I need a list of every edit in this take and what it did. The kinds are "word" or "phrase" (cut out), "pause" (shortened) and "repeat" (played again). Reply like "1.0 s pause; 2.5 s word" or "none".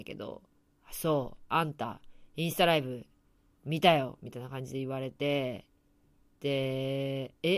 none